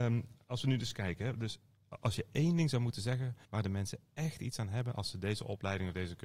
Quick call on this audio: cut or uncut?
cut